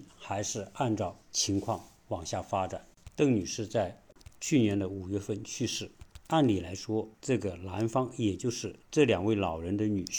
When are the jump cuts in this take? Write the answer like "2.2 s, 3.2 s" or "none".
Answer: 1.2 s, 7.1 s, 8.8 s